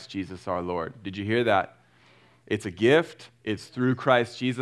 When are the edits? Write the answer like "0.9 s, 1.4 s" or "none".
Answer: none